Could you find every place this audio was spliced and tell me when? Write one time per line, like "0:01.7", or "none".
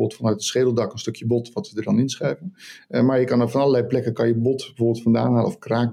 none